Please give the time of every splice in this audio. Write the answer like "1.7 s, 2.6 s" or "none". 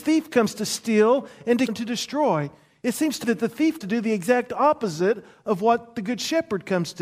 1.7 s, 3.2 s, 3.8 s